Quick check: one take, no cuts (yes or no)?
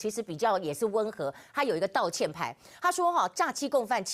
yes